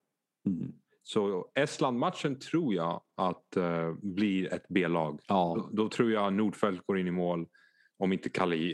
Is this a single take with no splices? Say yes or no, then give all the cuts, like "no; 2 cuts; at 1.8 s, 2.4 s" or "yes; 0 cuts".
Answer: no; 1 cut; at 5.2 s